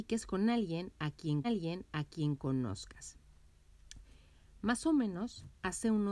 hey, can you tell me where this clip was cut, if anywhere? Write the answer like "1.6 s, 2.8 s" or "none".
1.4 s